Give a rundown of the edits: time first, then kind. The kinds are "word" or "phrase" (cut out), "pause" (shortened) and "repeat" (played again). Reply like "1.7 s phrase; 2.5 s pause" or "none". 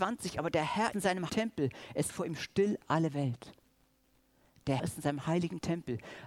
0.9 s word; 1.3 s word; 2.1 s word; 4.8 s word